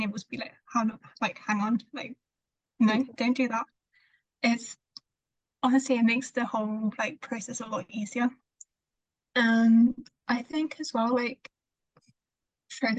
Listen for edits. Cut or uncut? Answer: uncut